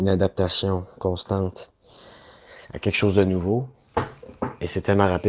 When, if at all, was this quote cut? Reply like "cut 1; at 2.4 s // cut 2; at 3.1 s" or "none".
none